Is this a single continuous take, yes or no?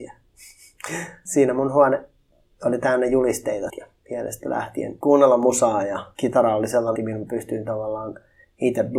no